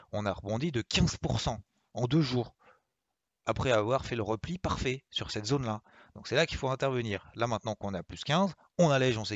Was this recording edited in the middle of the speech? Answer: no; 0 cuts

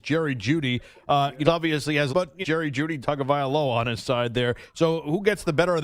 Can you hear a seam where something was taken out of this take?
yes; 4 cuts; at 1.4 s, 2.1 s, 2.4 s, 3.0 s

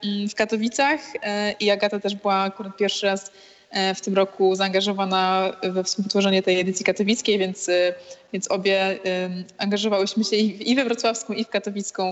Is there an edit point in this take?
no; 0 cuts

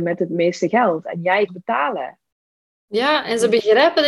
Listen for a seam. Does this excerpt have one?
yes; 1 cut; at 1.5 s

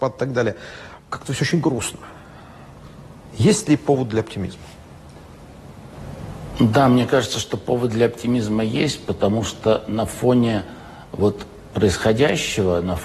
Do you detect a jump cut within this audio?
yes; 1 cut; at 1.0 s

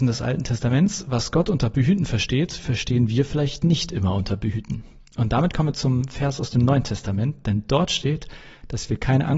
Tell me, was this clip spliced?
no; 0 cuts

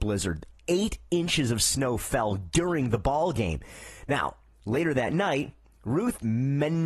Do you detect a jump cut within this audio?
no; 0 cuts

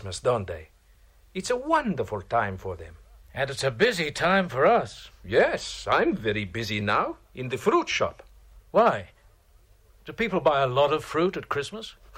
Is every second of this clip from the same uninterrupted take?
yes; 0 cuts

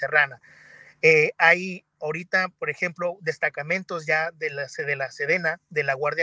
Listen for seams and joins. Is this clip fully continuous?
yes; 0 cuts

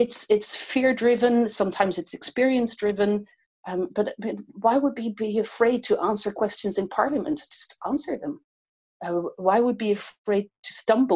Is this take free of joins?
yes; 0 cuts

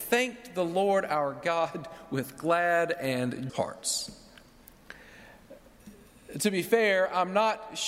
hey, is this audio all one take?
no; 1 cut; at 3.5 s

